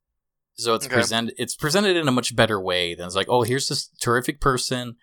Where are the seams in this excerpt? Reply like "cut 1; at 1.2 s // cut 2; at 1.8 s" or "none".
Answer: none